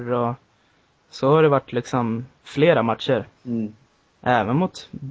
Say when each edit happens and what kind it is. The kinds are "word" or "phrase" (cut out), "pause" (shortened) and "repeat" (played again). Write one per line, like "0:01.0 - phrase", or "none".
0:03.3 - pause